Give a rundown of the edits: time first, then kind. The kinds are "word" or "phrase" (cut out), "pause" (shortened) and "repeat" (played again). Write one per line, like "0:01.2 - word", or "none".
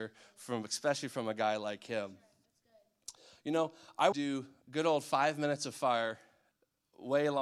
0:04.1 - phrase